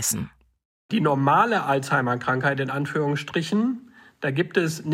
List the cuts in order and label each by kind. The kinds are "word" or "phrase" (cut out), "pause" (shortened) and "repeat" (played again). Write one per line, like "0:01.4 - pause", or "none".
none